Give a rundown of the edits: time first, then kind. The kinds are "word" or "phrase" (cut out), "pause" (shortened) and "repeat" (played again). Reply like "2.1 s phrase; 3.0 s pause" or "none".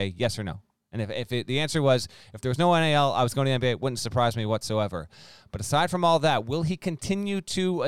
none